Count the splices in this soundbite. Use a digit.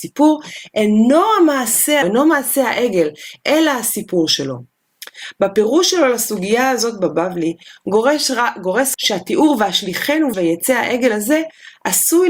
3